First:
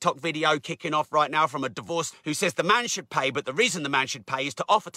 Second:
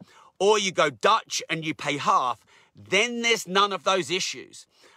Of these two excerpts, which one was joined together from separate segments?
first; 1 cut; at 2.1 s

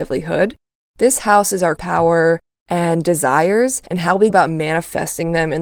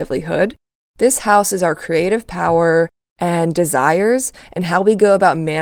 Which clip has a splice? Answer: first; 3 cuts; at 1.8 s, 3.9 s, 4.3 s

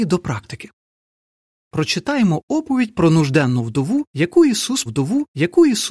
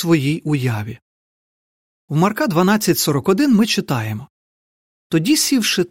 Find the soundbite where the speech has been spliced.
first; 1 cut; at 4.9 s

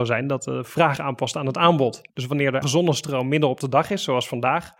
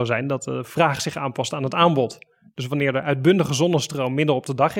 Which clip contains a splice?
first; 3 cuts; at 1.0 s, 2.1 s, 2.6 s

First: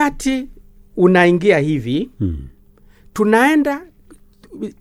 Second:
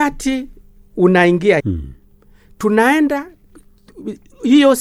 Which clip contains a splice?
second; 1 cut; at 1.6 s

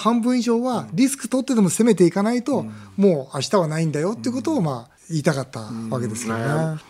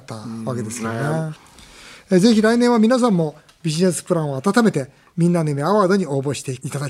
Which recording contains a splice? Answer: first; 1 cut; at 5.0 s

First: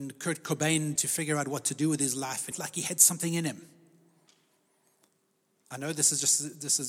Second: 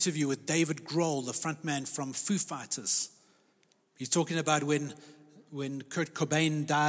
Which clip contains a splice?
first; 2 cuts; at 1.0 s, 2.5 s

